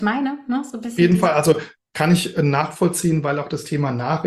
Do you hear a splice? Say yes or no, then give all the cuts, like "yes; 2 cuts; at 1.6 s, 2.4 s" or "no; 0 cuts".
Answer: no; 0 cuts